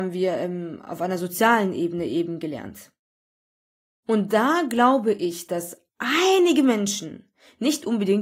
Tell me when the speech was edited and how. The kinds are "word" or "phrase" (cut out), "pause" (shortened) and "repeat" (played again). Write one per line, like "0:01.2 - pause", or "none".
0:05.9 - pause